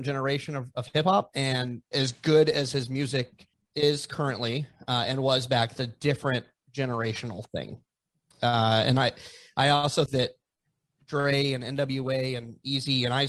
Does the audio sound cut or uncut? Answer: cut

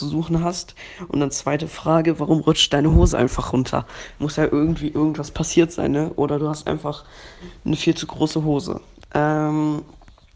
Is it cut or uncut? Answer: uncut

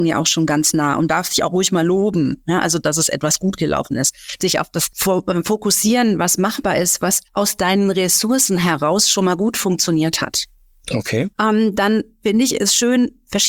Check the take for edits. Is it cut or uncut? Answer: cut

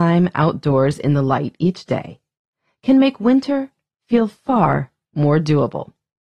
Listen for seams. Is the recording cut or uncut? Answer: uncut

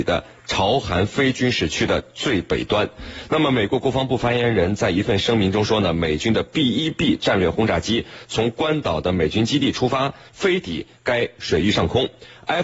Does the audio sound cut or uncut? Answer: uncut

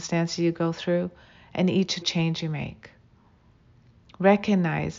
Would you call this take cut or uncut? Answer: cut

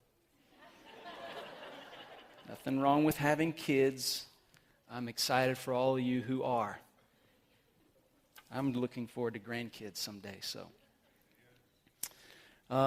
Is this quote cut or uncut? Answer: uncut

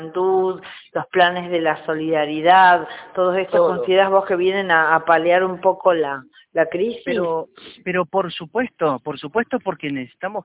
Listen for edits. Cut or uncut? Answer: uncut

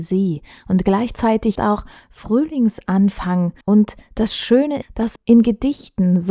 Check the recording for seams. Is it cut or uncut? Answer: cut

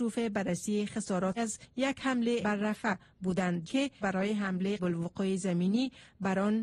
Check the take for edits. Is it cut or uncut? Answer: cut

